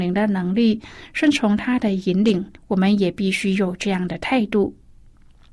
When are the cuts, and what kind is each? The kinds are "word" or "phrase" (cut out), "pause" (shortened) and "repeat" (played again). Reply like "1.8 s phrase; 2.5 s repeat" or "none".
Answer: 2.6 s pause